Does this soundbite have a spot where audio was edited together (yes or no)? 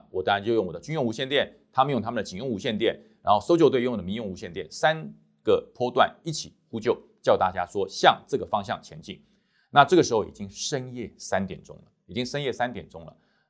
no